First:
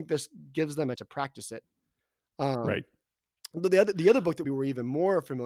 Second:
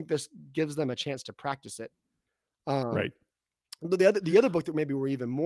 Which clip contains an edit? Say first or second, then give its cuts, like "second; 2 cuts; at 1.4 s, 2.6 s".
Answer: first; 2 cuts; at 1.0 s, 4.4 s